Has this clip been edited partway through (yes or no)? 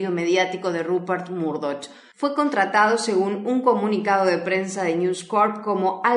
no